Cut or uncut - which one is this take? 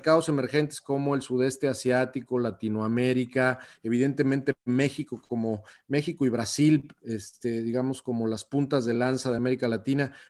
uncut